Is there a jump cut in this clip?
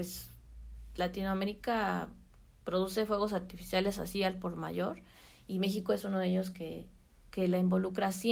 no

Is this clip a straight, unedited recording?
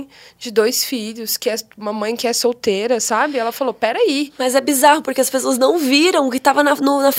yes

